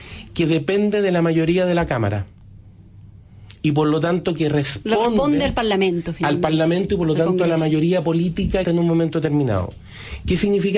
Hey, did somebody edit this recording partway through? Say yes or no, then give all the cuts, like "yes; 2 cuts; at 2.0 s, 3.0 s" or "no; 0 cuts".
yes; 1 cut; at 8.6 s